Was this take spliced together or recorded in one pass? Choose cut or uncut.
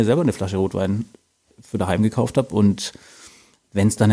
uncut